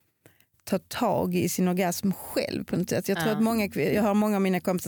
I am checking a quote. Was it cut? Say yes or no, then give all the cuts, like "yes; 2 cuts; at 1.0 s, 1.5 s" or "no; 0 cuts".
no; 0 cuts